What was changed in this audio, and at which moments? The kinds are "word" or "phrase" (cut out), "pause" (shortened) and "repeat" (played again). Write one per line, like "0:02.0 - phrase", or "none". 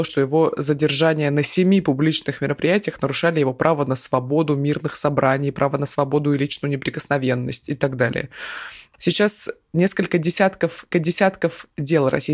0:10.9 - repeat